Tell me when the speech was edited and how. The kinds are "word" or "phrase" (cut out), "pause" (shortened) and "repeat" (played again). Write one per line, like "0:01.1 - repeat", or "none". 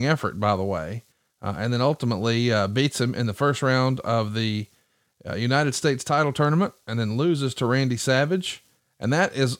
0:01.1 - pause